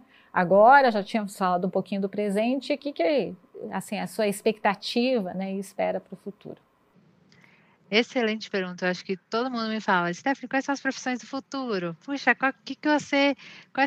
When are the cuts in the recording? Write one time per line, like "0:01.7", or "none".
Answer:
none

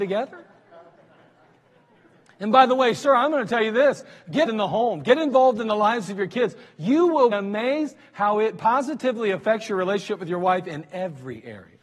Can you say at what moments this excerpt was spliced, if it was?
0:04.5
0:07.3

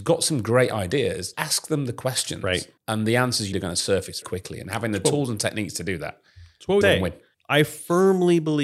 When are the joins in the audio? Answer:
0:01.3
0:02.8
0:03.5
0:04.2
0:06.8
0:07.3

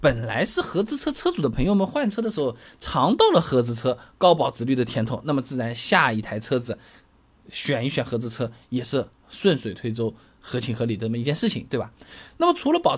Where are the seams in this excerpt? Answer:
none

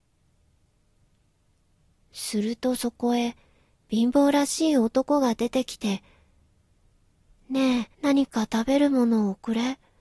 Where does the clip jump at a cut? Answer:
0:07.9

